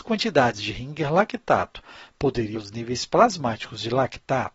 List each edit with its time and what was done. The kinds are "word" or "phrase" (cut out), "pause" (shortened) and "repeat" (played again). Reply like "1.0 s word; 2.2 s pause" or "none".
2.5 s word

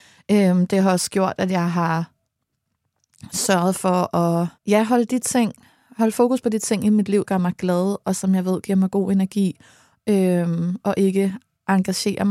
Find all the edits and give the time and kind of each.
4.6 s pause; 7.2 s phrase

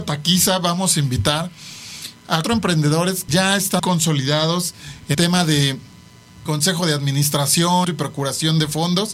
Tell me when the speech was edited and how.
2.4 s word; 3.3 s word; 3.8 s word; 5.1 s word; 6.5 s word; 7.8 s word

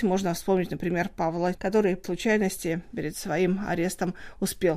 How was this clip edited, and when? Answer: 1.5 s word; 2.0 s word

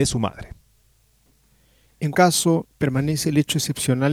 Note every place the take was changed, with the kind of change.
2.1 s word

